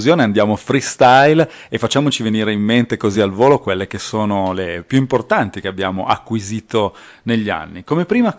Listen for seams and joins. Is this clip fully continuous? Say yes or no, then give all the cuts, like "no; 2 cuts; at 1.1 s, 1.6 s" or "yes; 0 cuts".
yes; 0 cuts